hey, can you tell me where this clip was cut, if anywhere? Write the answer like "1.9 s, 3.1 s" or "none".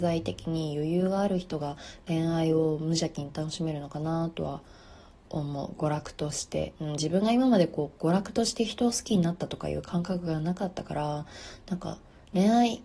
6.8 s